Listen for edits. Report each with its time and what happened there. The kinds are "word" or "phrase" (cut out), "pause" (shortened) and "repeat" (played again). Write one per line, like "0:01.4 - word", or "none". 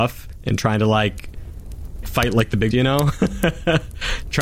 0:02.0 - word
0:02.7 - word